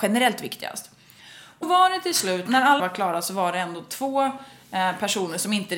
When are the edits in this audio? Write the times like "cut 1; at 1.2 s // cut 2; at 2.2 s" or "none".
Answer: cut 1; at 1.6 s // cut 2; at 2.5 s // cut 3; at 2.8 s